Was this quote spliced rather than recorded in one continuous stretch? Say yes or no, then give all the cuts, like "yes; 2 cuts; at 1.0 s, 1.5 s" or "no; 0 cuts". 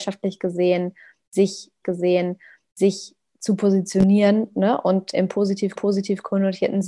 yes; 3 cuts; at 1.8 s, 5.1 s, 5.8 s